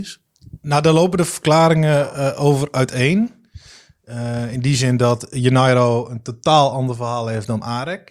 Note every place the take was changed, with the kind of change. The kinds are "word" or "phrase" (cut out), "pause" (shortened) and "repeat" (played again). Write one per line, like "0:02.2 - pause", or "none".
none

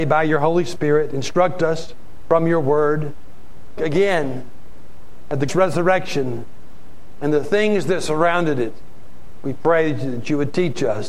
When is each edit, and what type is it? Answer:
0:03.8 - phrase
0:05.5 - word

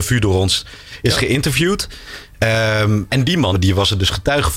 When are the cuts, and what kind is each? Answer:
0:03.1 - word
0:03.5 - word

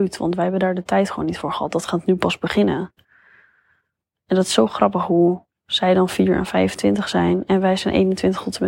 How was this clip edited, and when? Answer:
none

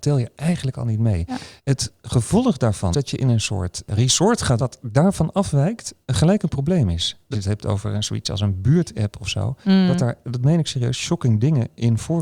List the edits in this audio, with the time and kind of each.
0:01.6 - pause
0:02.9 - word
0:04.6 - phrase
0:06.0 - pause
0:07.3 - phrase
0:10.2 - word

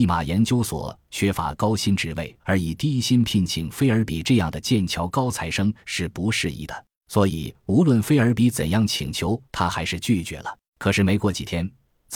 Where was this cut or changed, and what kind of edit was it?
0:02.4 - pause
0:07.0 - pause
0:09.4 - pause
0:10.7 - pause

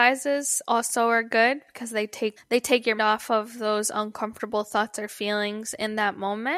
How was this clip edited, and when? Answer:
0:02.4 - word
0:03.0 - word

